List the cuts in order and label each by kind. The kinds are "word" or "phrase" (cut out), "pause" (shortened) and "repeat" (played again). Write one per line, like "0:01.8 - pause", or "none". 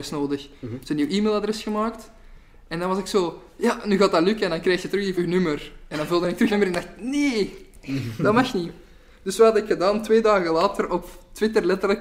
0:05.1 - word
0:06.5 - word